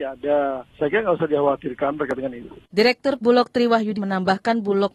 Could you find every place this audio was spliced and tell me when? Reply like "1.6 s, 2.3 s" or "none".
3.2 s, 3.9 s

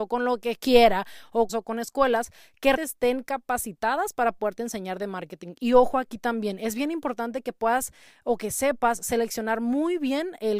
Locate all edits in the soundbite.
1.5 s, 2.8 s

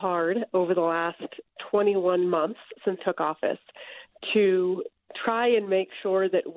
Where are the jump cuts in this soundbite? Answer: 3.0 s

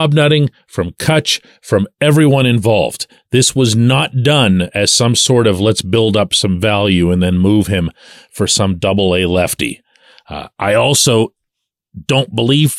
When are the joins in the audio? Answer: none

